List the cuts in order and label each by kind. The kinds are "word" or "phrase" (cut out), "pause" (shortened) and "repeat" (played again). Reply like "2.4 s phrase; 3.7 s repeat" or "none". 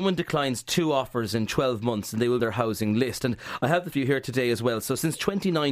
2.4 s phrase; 3.9 s word